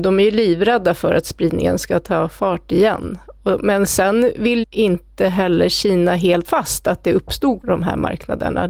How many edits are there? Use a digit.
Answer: 3